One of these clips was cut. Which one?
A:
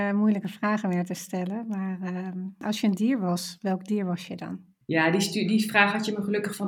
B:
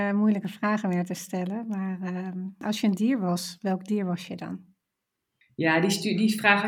A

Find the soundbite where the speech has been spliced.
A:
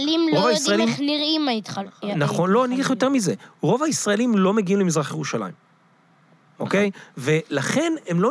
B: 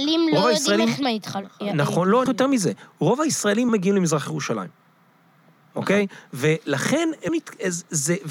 B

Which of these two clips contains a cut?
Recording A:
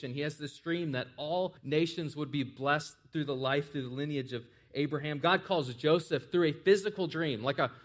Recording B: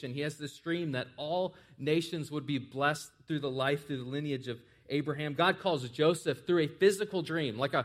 A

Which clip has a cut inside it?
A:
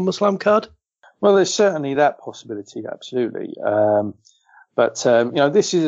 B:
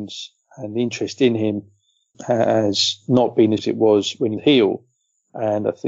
B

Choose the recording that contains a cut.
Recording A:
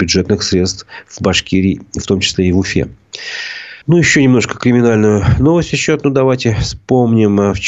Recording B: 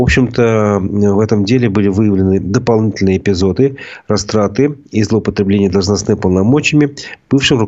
A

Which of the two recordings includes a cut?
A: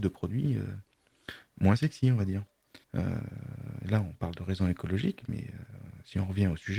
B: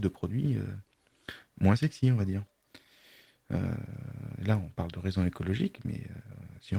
A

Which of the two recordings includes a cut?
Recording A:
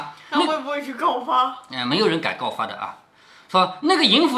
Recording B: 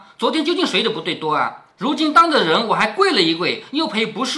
B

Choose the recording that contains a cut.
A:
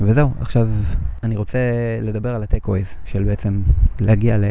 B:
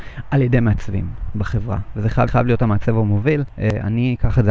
B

